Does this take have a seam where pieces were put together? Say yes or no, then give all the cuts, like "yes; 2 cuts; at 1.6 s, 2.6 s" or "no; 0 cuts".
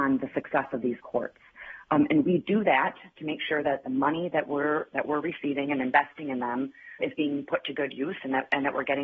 yes; 1 cut; at 7.0 s